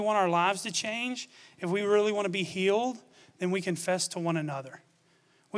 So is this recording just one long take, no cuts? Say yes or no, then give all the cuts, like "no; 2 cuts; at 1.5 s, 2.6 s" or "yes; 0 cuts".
yes; 0 cuts